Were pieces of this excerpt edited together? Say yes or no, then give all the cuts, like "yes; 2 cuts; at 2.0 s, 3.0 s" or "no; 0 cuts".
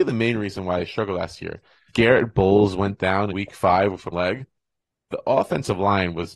yes; 3 cuts; at 1.9 s, 3.3 s, 4.1 s